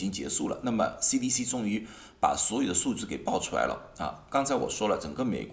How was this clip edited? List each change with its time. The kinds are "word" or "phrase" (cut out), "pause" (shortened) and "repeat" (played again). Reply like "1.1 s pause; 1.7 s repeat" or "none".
none